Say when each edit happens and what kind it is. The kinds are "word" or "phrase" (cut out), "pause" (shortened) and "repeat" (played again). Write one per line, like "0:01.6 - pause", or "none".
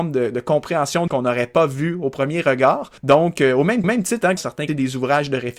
0:01.1 - phrase
0:03.0 - pause
0:03.8 - repeat
0:04.4 - phrase
0:04.7 - phrase